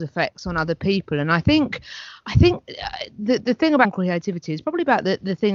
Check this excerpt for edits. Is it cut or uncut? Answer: cut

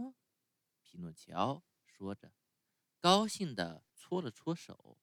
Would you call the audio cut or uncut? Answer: cut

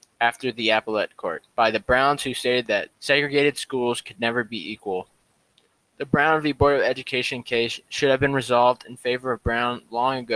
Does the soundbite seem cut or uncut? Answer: cut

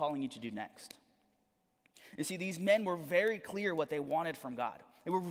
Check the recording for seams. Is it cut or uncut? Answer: uncut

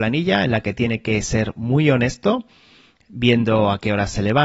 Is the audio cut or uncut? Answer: uncut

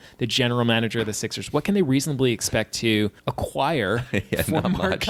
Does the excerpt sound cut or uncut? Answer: cut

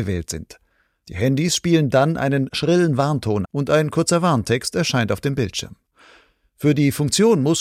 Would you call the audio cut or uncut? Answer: cut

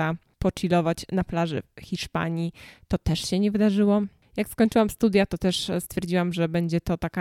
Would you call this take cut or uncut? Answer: uncut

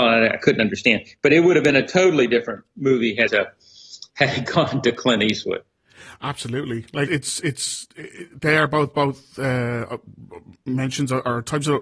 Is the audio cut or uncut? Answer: cut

